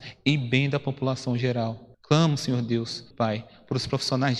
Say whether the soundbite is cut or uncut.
cut